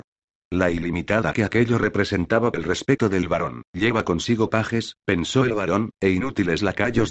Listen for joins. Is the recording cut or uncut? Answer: cut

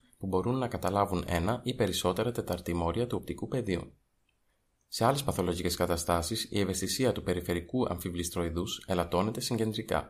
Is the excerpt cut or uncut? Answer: uncut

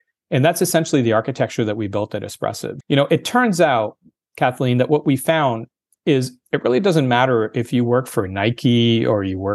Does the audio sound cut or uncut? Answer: cut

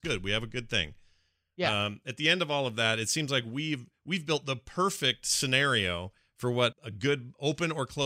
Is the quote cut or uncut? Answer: cut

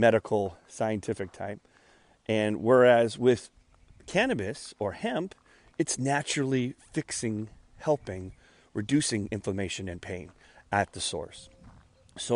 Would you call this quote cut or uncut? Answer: uncut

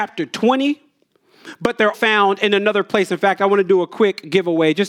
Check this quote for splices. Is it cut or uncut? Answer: cut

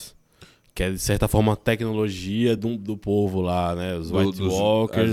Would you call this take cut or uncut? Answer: uncut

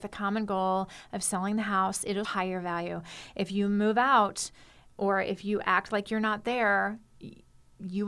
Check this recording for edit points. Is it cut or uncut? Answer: cut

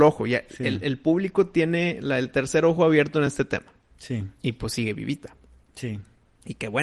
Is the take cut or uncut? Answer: uncut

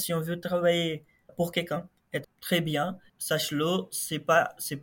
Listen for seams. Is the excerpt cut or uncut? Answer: cut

